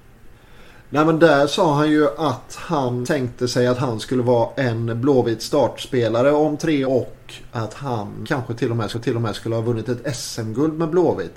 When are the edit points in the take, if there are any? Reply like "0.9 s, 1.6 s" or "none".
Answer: 3.0 s, 6.8 s, 8.2 s, 8.9 s

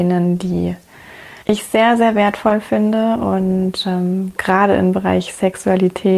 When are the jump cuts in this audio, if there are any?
1.4 s

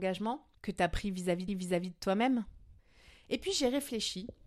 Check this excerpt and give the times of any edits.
1.5 s

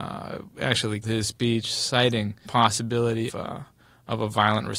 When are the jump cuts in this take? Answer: 1.0 s, 2.4 s, 3.3 s

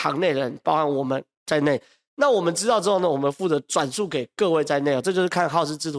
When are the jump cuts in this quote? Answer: none

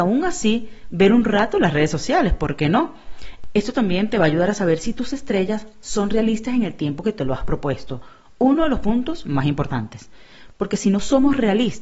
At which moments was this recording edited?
none

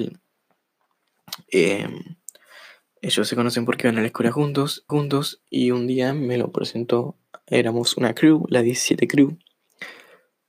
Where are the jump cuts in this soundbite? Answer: 4.9 s

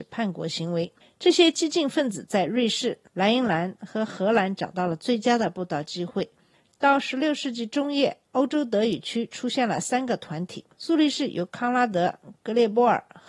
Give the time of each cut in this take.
1.0 s, 8.2 s, 10.7 s

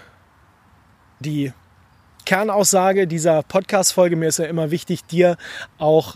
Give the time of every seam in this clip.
1.2 s

